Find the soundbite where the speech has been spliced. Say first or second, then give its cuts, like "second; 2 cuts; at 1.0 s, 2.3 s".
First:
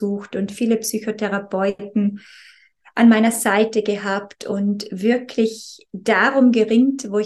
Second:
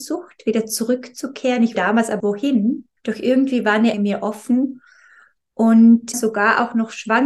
second; 5 cuts; at 1.7 s, 2.2 s, 3.0 s, 3.9 s, 6.1 s